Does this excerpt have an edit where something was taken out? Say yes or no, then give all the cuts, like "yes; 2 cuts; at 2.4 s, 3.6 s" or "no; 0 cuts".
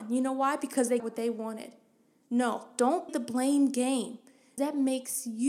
yes; 3 cuts; at 1.0 s, 3.1 s, 4.6 s